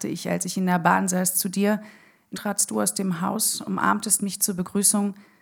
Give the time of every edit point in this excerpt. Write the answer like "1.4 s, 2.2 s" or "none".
2.3 s